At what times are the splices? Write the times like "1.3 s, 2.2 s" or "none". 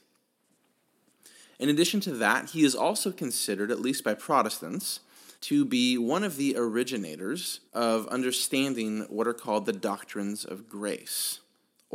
5.4 s, 7.7 s